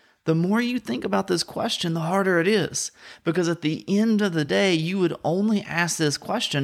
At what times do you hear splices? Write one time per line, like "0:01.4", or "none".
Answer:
none